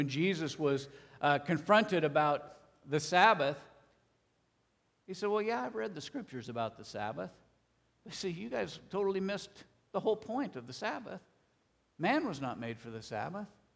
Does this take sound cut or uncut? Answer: uncut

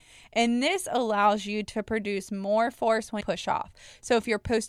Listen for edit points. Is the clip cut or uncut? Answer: cut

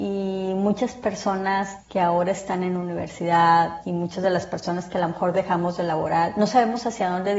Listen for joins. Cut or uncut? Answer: uncut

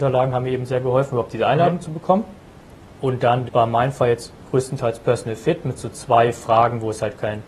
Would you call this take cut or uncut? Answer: cut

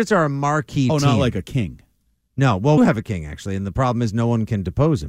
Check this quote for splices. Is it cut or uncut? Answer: cut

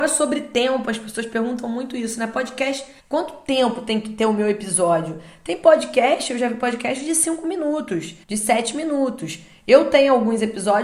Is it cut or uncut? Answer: cut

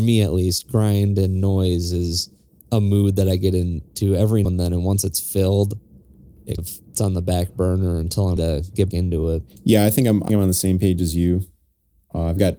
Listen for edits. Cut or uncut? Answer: cut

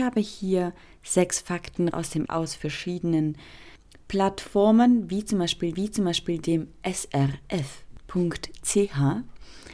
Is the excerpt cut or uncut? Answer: cut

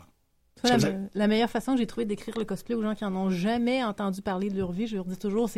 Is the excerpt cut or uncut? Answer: uncut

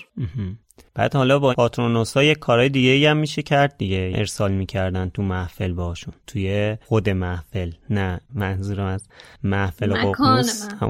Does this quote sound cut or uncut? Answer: cut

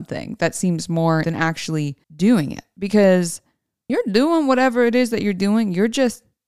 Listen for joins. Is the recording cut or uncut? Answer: cut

